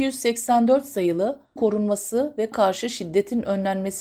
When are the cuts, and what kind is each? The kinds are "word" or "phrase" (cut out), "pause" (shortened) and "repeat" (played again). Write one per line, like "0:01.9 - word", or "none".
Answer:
0:01.6 - word
0:02.5 - word

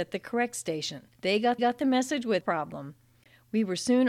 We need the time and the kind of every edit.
0:01.1 - pause
0:01.6 - repeat
0:02.4 - word

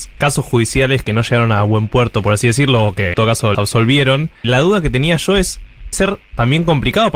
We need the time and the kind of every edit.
0:01.0 - word
0:03.1 - word
0:03.5 - word
0:04.4 - word
0:05.9 - word

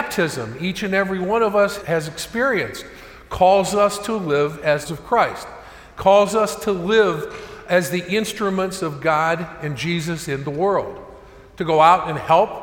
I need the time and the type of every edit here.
0:01.8 - word
0:04.8 - word

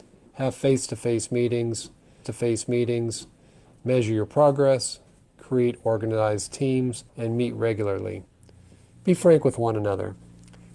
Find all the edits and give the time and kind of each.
0:02.2 - repeat
0:07.1 - pause

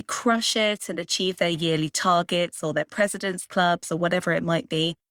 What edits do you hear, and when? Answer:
none

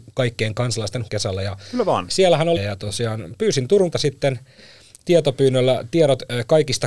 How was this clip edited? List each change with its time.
0:01.1 - phrase
0:02.6 - phrase
0:03.9 - word

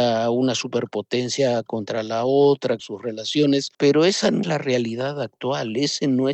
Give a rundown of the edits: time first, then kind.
0:02.8 - word
0:04.4 - word

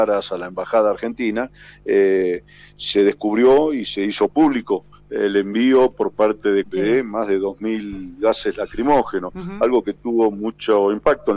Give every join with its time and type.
0:06.6 - word

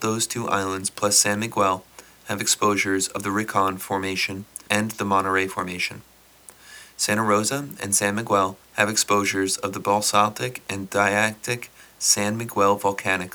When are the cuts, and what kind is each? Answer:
0:08.6 - pause

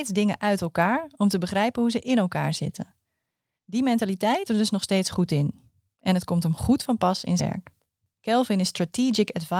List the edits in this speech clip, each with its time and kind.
0:04.5 - word
0:07.4 - word

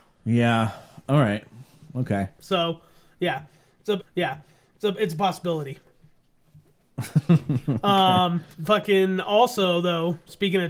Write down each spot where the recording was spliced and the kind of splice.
0:01.0 - pause
0:04.0 - repeat
0:08.5 - pause

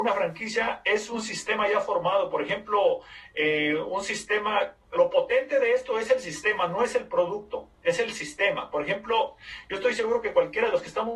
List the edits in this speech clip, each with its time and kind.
0:04.9 - word

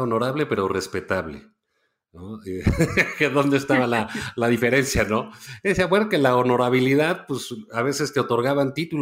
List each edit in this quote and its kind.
none

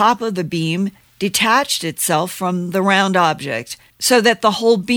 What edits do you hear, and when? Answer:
none

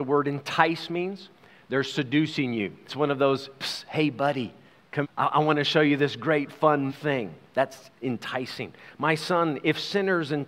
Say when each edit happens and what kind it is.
0:02.9 - word
0:05.0 - word
0:06.9 - word

